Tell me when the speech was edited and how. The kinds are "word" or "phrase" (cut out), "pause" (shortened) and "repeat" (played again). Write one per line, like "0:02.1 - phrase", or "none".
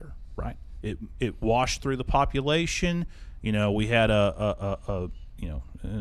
none